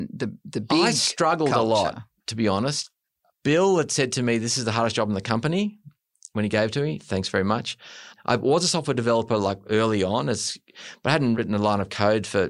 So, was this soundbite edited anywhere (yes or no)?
no